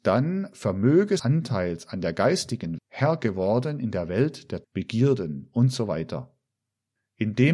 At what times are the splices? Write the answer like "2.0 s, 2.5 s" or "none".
1.2 s, 2.8 s, 4.6 s

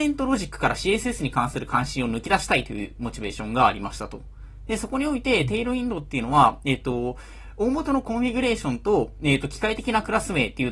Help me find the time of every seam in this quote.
none

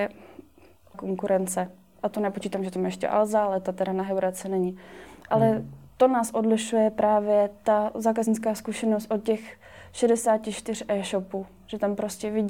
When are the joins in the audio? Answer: 0.9 s, 5.9 s

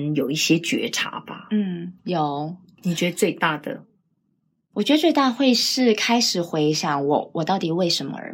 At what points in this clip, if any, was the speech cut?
none

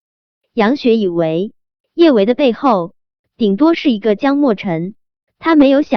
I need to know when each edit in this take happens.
none

